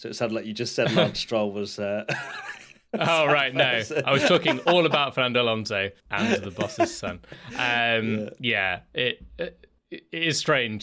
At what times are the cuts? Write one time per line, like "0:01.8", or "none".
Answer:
0:06.0
0:09.8